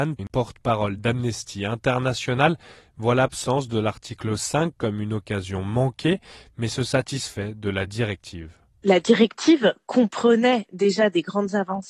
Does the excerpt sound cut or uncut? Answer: uncut